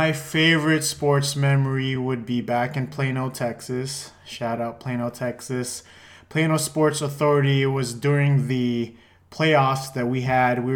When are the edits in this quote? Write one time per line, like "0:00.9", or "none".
none